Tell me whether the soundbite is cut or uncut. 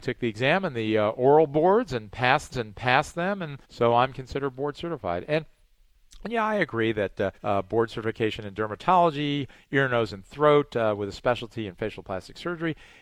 cut